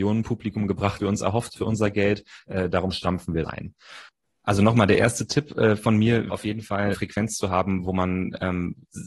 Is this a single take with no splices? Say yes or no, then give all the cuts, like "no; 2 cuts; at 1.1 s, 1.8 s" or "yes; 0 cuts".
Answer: no; 5 cuts; at 1.0 s, 1.6 s, 3.4 s, 6.3 s, 6.9 s